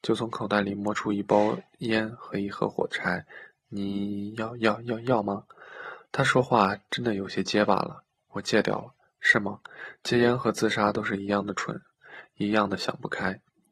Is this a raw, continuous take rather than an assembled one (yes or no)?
yes